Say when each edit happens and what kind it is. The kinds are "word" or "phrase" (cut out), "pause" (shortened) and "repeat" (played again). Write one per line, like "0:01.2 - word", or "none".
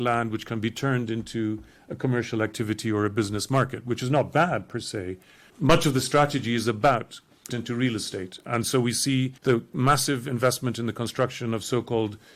0:05.5 - word
0:07.5 - phrase
0:09.4 - pause